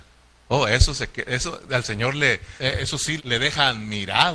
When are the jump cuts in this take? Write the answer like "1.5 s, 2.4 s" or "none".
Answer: 2.6 s, 3.2 s